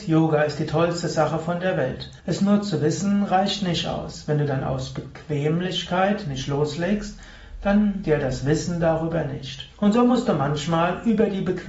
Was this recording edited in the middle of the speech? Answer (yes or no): yes